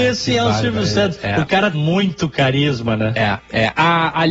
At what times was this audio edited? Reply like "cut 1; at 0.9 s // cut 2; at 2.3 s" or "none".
cut 1; at 1.7 s